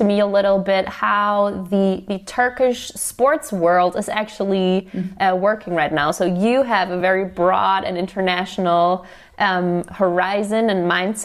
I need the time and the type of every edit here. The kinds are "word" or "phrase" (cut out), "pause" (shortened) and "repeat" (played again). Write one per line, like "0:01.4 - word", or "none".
none